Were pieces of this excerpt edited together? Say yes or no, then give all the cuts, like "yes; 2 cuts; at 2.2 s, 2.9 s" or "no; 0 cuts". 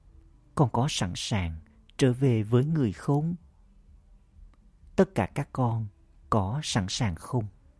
no; 0 cuts